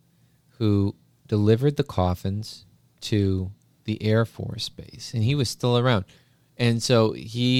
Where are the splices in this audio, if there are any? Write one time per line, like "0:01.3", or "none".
none